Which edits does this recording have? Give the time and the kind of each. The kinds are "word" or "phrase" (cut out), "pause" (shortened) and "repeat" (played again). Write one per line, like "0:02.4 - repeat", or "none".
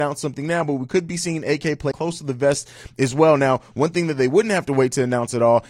0:01.9 - word